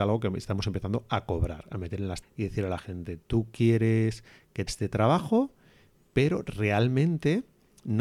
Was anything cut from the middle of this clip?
yes; 2 cuts; at 2.2 s, 4.7 s

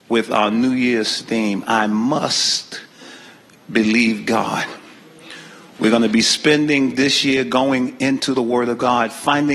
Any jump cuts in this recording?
no; 0 cuts

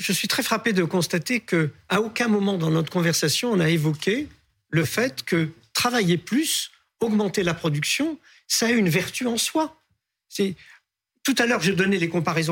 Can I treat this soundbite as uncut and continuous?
yes; 0 cuts

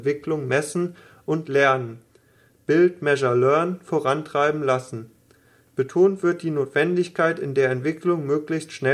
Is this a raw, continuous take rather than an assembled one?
yes; 0 cuts

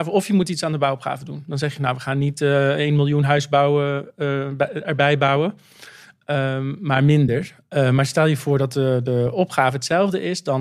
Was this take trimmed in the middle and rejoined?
no; 0 cuts

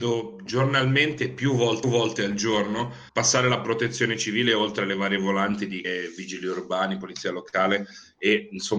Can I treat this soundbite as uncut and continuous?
no; 3 cuts; at 1.8 s, 3.1 s, 5.8 s

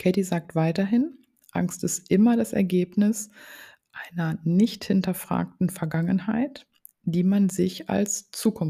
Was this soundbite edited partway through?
no; 0 cuts

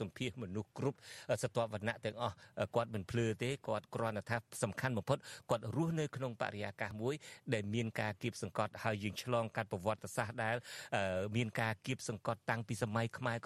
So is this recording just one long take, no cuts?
yes; 0 cuts

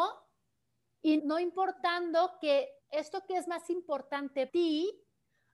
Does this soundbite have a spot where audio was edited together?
yes; 3 cuts; at 1.2 s, 2.8 s, 4.5 s

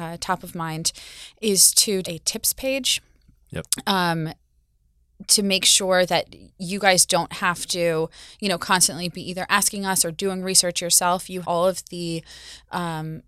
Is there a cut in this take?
yes; 2 cuts; at 2.0 s, 11.4 s

